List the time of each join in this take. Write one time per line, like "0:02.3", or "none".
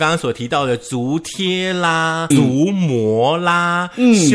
0:02.3